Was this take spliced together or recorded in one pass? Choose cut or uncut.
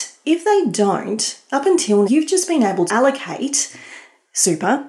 cut